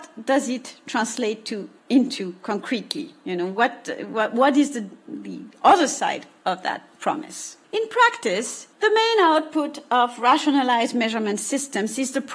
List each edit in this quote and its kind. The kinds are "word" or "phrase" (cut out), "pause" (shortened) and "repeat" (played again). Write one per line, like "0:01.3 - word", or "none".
0:01.8 - pause
0:07.6 - pause
0:08.7 - pause